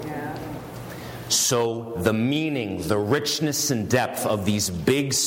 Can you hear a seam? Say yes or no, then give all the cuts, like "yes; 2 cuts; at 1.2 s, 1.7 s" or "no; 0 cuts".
no; 0 cuts